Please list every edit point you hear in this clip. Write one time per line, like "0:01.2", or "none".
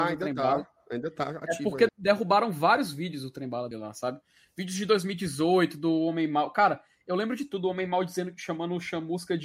0:01.4
0:01.9
0:03.7